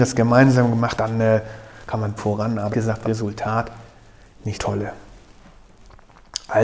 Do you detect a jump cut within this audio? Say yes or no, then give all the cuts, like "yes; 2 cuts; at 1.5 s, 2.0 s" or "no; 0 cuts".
yes; 5 cuts; at 1.0 s, 2.2 s, 2.7 s, 3.0 s, 4.5 s